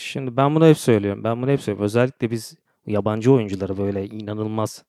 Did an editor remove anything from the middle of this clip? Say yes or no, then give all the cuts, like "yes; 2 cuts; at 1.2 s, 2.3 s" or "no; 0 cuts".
no; 0 cuts